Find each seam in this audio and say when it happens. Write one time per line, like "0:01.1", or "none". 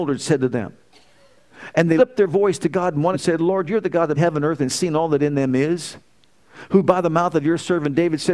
0:02.0
0:03.1
0:04.1